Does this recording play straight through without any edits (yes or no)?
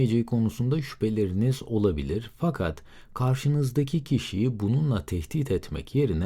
yes